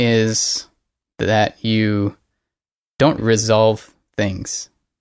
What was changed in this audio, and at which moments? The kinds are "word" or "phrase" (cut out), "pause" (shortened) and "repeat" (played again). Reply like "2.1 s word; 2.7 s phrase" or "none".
3.2 s word